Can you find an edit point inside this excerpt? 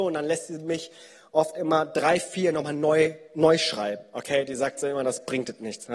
no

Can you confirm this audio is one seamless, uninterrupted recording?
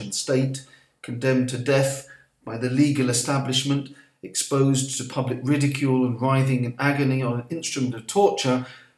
yes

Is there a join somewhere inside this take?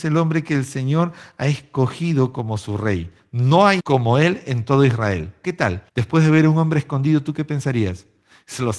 yes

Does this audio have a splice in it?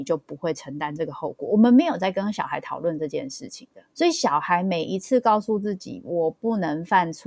yes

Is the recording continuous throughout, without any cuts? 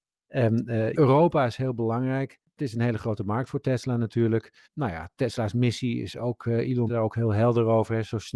no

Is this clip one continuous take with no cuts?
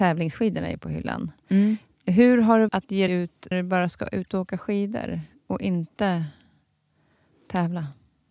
no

